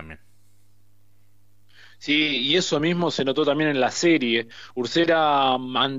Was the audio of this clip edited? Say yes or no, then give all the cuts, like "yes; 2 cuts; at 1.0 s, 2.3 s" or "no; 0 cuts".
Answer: no; 0 cuts